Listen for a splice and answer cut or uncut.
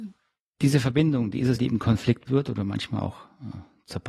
cut